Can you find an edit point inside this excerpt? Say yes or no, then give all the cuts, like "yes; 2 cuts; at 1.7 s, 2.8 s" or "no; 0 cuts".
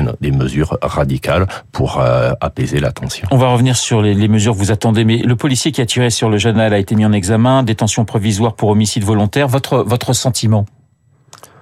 no; 0 cuts